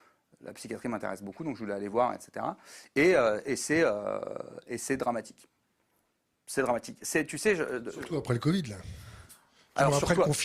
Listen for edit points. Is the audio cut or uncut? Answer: uncut